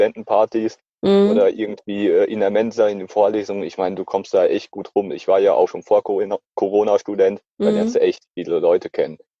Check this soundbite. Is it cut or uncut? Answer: cut